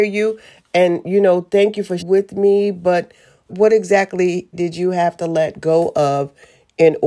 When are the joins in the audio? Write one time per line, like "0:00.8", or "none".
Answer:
0:02.0
0:03.5
0:04.5